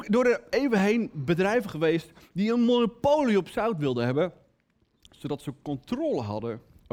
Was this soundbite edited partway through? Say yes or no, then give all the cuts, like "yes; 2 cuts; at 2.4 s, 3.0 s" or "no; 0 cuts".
no; 0 cuts